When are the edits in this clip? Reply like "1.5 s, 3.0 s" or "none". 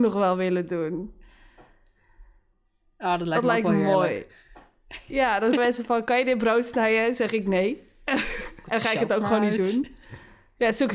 5.6 s, 8.6 s